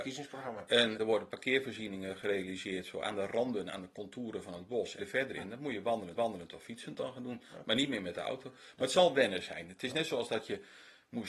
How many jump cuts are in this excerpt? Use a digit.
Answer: 3